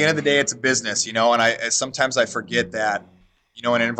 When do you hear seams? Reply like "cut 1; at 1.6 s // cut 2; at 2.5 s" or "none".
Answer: none